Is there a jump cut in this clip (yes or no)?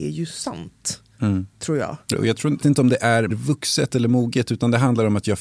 yes